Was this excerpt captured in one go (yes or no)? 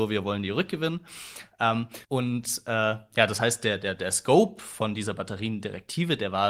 no